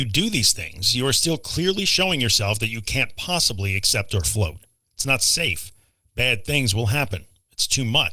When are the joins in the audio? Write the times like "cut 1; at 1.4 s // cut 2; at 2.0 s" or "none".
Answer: none